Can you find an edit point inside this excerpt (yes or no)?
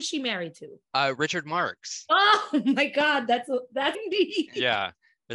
yes